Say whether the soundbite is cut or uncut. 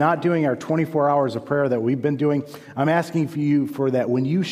uncut